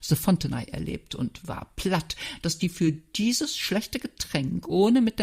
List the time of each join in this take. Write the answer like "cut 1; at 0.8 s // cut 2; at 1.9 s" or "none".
none